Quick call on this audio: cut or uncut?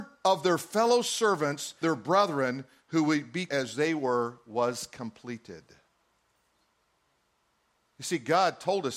cut